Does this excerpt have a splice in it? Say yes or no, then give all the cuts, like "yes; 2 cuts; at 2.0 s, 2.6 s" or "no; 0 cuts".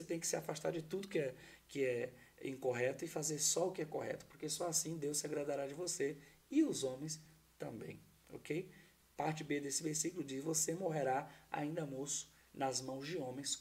no; 0 cuts